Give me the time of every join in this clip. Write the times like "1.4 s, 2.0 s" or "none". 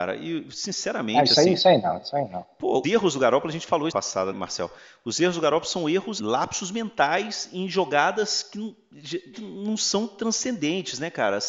2.8 s, 3.9 s, 4.3 s, 6.2 s, 9.3 s